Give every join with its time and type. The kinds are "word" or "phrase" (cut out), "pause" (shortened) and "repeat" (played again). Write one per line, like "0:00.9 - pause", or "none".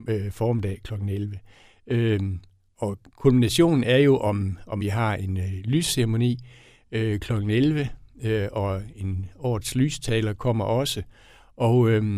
0:04.8 - phrase